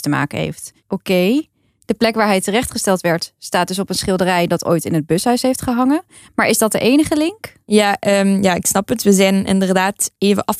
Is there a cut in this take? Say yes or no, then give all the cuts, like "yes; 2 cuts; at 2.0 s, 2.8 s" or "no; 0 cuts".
no; 0 cuts